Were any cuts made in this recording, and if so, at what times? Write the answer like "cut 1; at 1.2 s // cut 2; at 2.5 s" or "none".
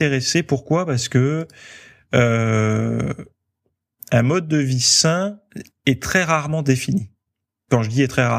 none